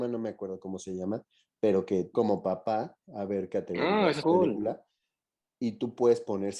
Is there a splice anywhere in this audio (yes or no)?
yes